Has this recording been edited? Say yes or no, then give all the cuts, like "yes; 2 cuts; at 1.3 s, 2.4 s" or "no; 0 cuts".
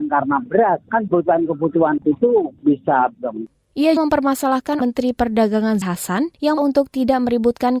yes; 7 cuts; at 1.1 s, 2.0 s, 3.1 s, 4.0 s, 4.8 s, 5.8 s, 6.6 s